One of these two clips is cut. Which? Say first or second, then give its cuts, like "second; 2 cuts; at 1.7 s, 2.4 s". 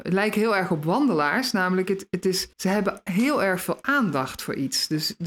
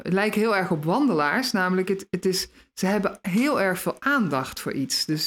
first; 1 cut; at 2.5 s